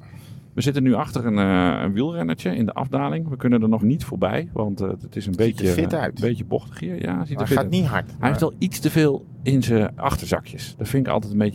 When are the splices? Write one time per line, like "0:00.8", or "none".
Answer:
0:03.8